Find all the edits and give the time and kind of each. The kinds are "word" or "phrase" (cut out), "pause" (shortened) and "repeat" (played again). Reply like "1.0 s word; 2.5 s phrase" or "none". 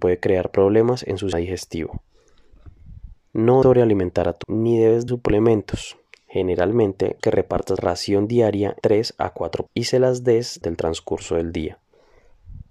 1.3 s word; 3.6 s word; 4.4 s word; 5.1 s word; 7.2 s word; 7.8 s word; 8.8 s word; 9.7 s word; 10.6 s word